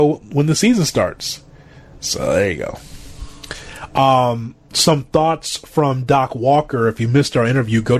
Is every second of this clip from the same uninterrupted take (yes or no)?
yes